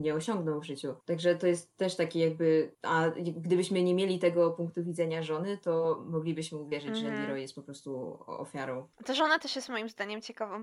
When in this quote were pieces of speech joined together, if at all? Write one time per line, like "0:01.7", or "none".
0:01.0
0:02.7
0:08.9